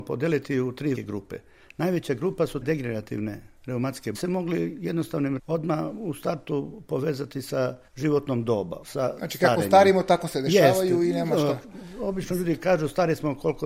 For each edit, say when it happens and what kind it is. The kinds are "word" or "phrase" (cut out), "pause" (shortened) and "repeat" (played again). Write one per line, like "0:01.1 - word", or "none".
0:00.9 - word
0:02.6 - word
0:04.1 - phrase
0:05.4 - word
0:07.9 - pause
0:08.8 - word